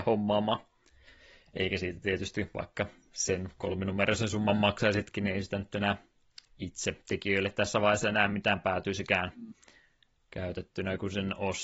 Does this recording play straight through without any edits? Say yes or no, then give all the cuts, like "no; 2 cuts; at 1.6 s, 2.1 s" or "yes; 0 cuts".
yes; 0 cuts